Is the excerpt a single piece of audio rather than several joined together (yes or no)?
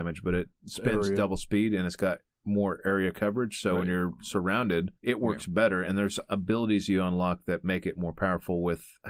no